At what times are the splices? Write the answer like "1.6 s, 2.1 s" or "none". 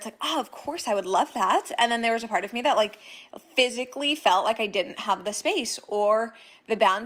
none